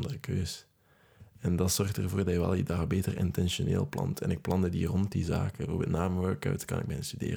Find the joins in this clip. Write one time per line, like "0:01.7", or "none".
none